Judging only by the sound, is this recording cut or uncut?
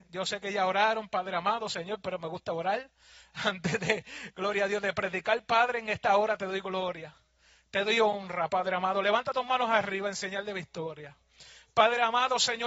uncut